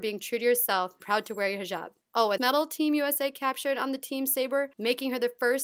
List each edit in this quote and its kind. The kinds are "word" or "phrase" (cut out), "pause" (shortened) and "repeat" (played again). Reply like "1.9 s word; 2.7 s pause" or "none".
1.0 s word; 2.0 s pause; 2.4 s phrase; 4.7 s pause